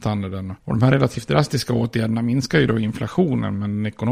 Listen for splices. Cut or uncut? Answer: uncut